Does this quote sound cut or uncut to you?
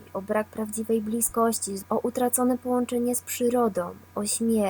cut